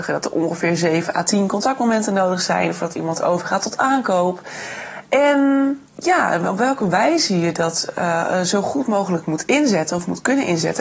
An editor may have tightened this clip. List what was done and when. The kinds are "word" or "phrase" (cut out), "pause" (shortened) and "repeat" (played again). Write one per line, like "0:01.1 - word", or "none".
0:05.9 - pause